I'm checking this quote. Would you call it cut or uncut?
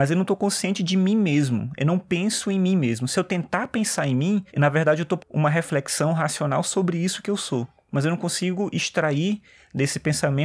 cut